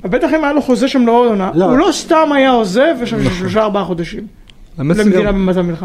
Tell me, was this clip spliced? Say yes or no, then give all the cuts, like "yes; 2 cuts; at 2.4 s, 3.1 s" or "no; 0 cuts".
no; 0 cuts